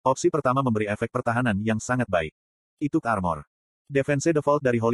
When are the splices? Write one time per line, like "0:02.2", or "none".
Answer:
0:03.0